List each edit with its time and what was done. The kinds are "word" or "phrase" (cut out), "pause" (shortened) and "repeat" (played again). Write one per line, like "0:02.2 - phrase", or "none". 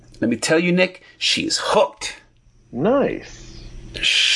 none